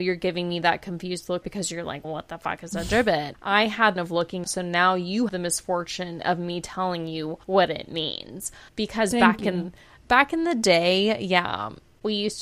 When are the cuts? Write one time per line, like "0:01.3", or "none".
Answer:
0:01.4
0:02.0
0:03.3
0:04.0
0:04.4
0:05.3
0:07.4
0:08.7